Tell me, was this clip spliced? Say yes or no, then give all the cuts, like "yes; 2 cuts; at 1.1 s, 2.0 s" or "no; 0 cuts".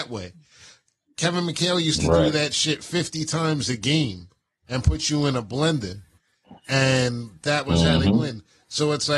no; 0 cuts